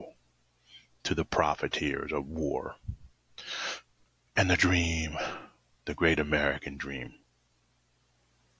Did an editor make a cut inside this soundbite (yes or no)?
no